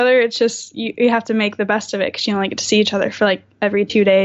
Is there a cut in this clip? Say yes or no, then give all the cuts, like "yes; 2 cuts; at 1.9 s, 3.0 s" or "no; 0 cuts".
no; 0 cuts